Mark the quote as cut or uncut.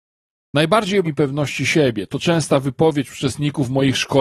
cut